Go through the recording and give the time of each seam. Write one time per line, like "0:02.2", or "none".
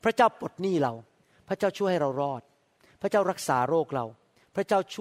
none